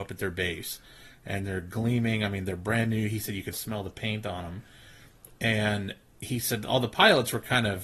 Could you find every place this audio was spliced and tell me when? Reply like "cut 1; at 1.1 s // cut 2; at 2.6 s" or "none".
cut 1; at 3.5 s

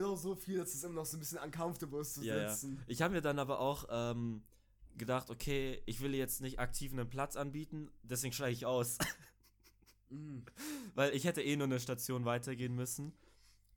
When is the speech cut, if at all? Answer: none

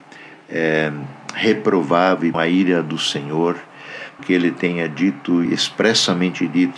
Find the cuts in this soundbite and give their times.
cut 1; at 2.3 s // cut 2; at 4.2 s // cut 3; at 5.5 s

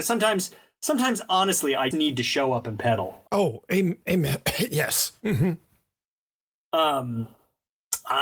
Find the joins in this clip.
cut 1; at 1.9 s // cut 2; at 3.3 s

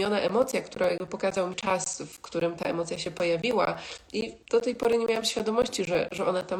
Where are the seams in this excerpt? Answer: cut 1; at 1.5 s // cut 2; at 4.4 s

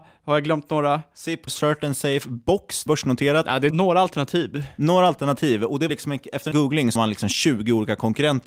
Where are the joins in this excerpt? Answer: cut 1; at 1.5 s // cut 2; at 2.9 s // cut 3; at 3.7 s // cut 4; at 5.9 s // cut 5; at 6.5 s // cut 6; at 7.0 s

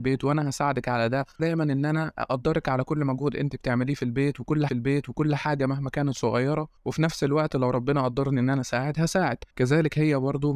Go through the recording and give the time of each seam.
cut 1; at 1.4 s // cut 2; at 4.7 s // cut 3; at 6.8 s // cut 4; at 9.5 s

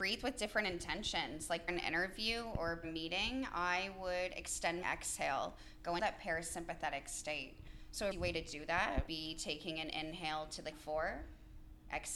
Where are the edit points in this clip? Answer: cut 1; at 1.7 s // cut 2; at 2.8 s // cut 3; at 4.8 s // cut 4; at 6.0 s // cut 5; at 8.1 s // cut 6; at 9.1 s // cut 7; at 10.7 s

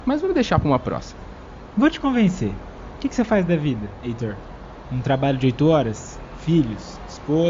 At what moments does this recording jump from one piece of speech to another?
none

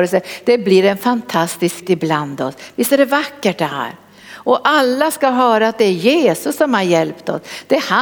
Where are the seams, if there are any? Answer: cut 1; at 1.8 s

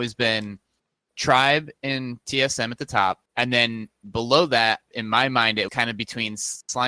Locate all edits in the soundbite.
cut 1; at 3.3 s // cut 2; at 5.7 s

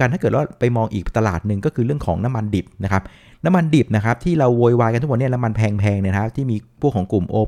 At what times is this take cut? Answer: none

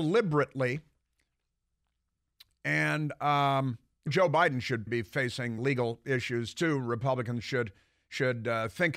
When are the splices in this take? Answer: cut 1; at 4.1 s // cut 2; at 4.9 s // cut 3; at 5.6 s

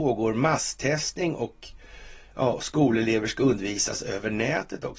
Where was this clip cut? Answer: none

